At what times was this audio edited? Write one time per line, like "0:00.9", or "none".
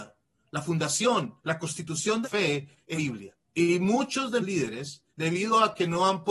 0:01.4
0:02.2
0:02.9
0:03.4
0:04.4
0:05.1